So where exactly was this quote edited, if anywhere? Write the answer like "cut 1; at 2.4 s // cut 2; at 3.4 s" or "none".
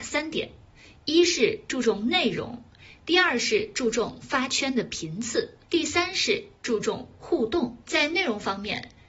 cut 1; at 5.6 s // cut 2; at 7.8 s